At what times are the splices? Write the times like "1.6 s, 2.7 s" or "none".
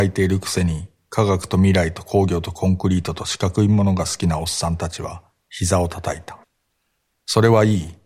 6.4 s